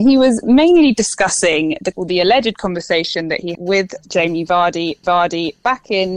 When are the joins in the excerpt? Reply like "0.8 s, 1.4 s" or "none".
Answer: 1.9 s, 3.5 s, 5.0 s